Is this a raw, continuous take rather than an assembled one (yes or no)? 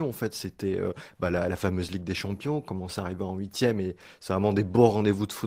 yes